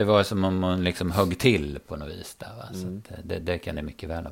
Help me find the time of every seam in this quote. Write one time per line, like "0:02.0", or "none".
none